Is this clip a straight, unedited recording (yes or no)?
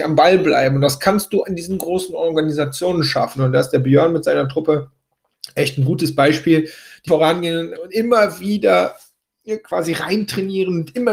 no